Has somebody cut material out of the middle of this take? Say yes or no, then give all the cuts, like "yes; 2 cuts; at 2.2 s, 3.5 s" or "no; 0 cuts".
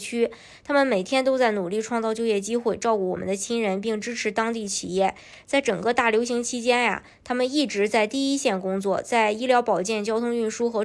no; 0 cuts